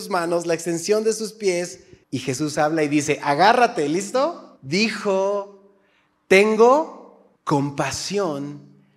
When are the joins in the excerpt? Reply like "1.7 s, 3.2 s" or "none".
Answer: 2.0 s, 4.6 s, 7.4 s